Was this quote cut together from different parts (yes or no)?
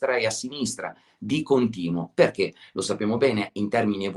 no